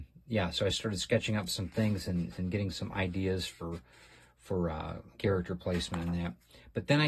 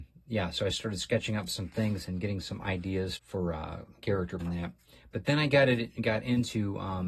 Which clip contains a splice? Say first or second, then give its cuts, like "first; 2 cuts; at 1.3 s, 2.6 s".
second; 3 cuts; at 2.0 s, 3.2 s, 4.4 s